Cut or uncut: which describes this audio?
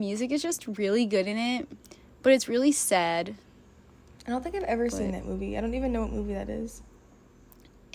uncut